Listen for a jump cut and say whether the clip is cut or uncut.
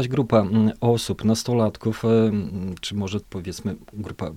cut